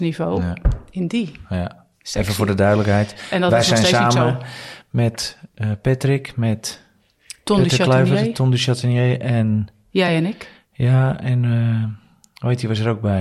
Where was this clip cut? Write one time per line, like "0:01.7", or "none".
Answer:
none